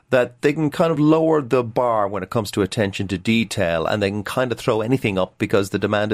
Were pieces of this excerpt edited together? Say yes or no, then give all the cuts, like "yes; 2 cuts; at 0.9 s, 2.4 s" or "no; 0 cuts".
no; 0 cuts